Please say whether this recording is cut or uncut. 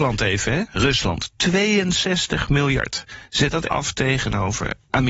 cut